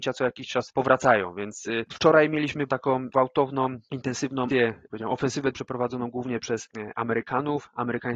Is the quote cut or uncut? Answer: cut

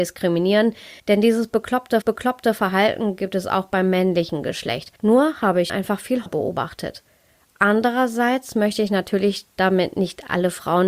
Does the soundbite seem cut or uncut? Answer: cut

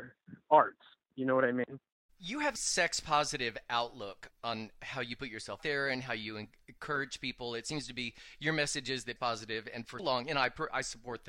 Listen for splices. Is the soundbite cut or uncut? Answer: cut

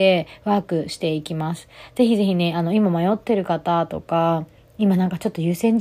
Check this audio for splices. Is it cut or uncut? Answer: uncut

